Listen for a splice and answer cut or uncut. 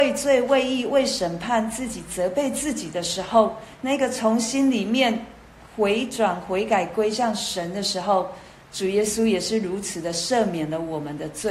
uncut